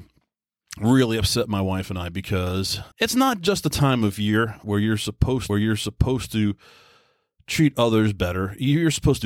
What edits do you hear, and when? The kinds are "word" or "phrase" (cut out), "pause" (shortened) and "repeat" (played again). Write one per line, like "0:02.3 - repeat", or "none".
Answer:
0:02.9 - pause
0:04.6 - word
0:05.5 - repeat